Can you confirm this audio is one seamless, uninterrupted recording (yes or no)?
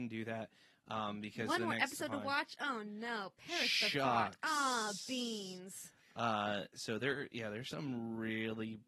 yes